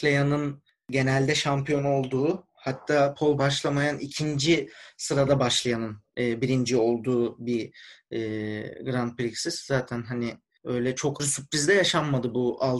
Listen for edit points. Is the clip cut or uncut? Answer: cut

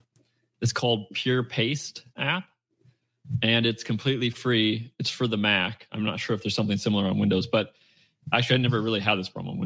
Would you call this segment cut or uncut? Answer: cut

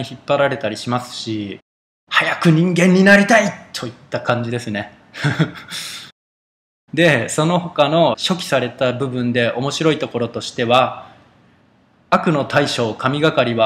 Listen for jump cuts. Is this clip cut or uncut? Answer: uncut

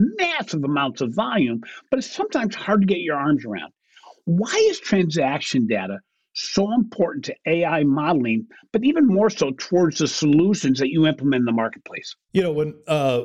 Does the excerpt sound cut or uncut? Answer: uncut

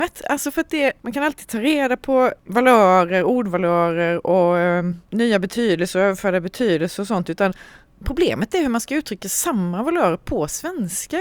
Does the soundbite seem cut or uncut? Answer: uncut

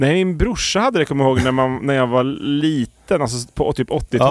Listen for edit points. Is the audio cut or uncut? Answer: uncut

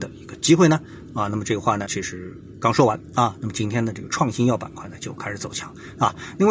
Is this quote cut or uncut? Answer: cut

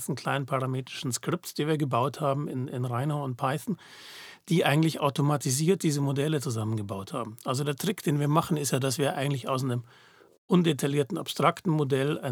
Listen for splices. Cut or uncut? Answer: uncut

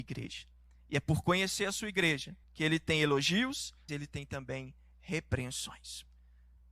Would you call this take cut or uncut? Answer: cut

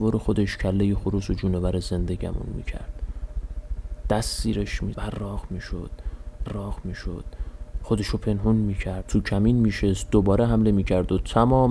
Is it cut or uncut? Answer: cut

